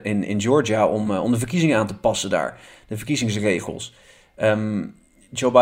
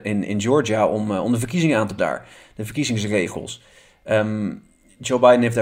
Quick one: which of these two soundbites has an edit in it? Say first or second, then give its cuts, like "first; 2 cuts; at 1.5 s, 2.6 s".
second; 1 cut; at 2.0 s